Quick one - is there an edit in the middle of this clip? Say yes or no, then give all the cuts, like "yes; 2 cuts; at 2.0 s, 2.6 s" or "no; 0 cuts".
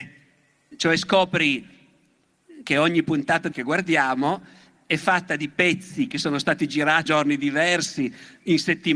yes; 2 cuts; at 3.5 s, 7.1 s